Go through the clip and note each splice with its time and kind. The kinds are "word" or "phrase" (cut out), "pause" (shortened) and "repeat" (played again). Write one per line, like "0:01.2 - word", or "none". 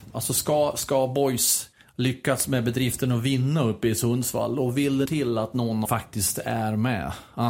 0:05.1 - word
0:05.9 - phrase